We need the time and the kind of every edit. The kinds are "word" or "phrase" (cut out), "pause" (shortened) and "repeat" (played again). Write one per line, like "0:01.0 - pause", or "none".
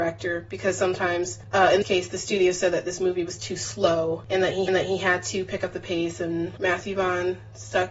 0:01.8 - word
0:04.7 - repeat